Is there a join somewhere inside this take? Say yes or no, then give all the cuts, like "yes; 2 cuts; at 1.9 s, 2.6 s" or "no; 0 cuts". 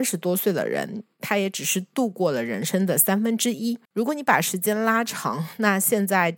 yes; 1 cut; at 3.8 s